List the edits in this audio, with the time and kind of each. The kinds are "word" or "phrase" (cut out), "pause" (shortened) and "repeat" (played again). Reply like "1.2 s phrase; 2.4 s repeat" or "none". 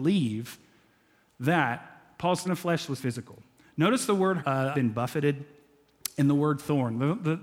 2.5 s word; 3.0 s word; 4.4 s phrase; 4.7 s phrase

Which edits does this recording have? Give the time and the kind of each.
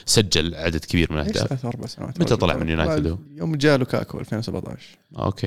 3.3 s pause

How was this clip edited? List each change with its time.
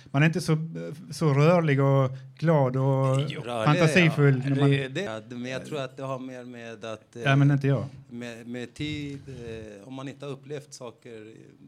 3.4 s word; 5.1 s word

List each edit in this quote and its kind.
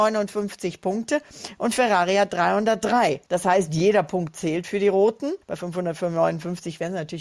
3.3 s pause; 5.4 s pause

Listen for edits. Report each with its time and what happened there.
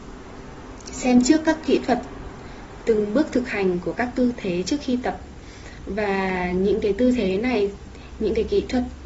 none

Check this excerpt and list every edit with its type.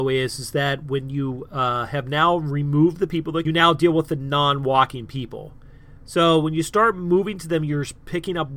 3.4 s phrase

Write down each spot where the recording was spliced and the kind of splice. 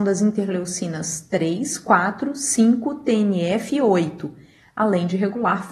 none

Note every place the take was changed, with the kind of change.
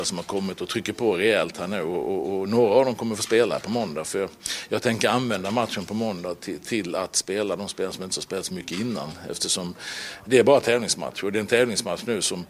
10.3 s word

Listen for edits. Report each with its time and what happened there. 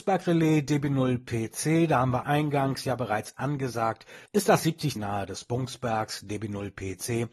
2.2 s phrase; 4.3 s pause; 5.0 s phrase

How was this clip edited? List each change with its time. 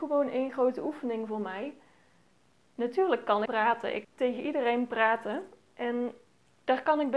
3.5 s word; 4.0 s word

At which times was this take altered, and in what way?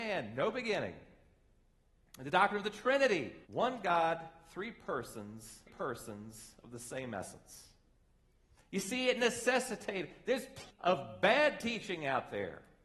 3.4 s pause; 5.7 s repeat; 10.7 s word

